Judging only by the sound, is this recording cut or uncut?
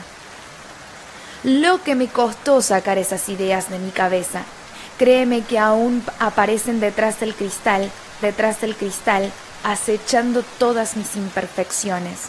cut